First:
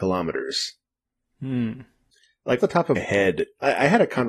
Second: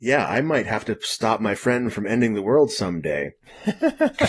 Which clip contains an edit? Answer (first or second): first